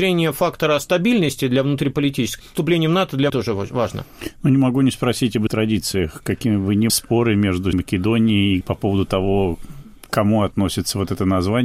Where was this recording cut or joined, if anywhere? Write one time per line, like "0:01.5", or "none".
0:02.4
0:03.3
0:05.5
0:06.9
0:07.7
0:08.6